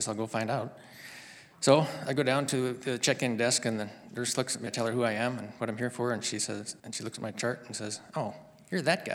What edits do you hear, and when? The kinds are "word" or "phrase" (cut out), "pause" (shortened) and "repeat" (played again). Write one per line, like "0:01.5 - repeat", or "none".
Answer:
0:04.7 - word
0:06.8 - pause